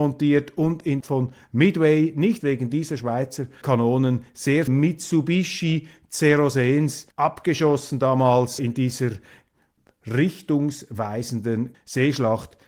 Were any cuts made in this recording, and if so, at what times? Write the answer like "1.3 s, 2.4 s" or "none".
1.0 s, 2.4 s, 3.6 s, 4.7 s, 7.1 s, 8.6 s, 11.7 s

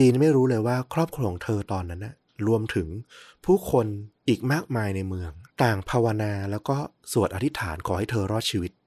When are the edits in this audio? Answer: 5.5 s

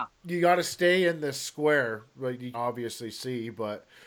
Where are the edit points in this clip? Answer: 2.5 s

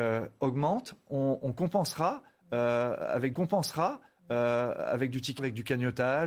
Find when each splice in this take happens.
1.4 s, 3.3 s, 5.4 s

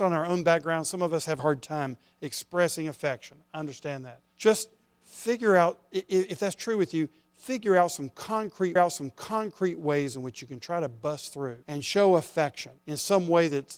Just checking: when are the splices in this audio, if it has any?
1.4 s, 4.3 s, 8.8 s, 11.6 s, 12.8 s

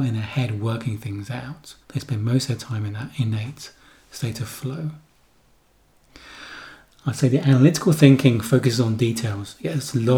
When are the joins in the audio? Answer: 1.8 s

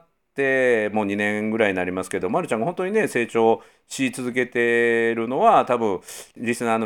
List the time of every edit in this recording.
none

